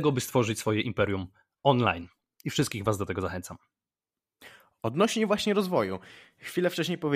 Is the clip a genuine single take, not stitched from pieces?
yes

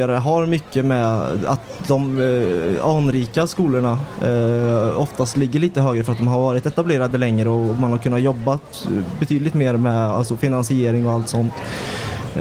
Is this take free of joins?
yes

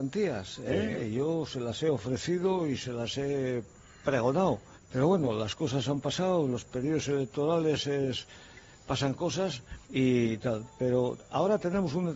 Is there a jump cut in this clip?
yes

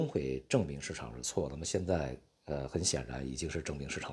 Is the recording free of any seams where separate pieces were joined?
yes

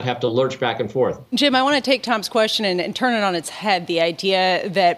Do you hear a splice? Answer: no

